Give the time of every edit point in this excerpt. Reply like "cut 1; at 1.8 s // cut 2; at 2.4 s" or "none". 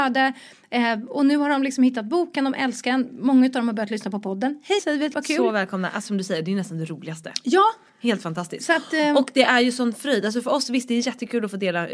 cut 1; at 4.8 s // cut 2; at 5.1 s // cut 3; at 6.1 s